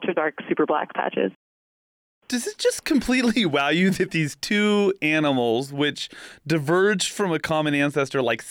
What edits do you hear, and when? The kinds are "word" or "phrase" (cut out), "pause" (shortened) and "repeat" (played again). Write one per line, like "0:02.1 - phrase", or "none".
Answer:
none